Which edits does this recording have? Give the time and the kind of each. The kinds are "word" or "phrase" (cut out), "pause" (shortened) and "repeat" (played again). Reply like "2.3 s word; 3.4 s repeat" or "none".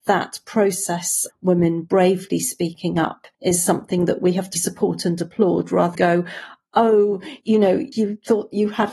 1.3 s word; 3.3 s pause; 4.6 s word; 6.0 s word; 7.4 s pause; 7.9 s word